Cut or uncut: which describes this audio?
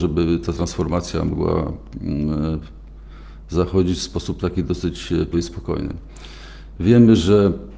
cut